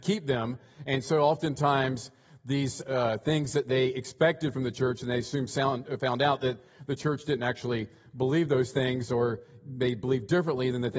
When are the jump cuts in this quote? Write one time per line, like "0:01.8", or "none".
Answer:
none